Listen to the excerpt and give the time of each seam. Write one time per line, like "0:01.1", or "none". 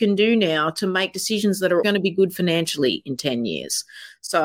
0:01.8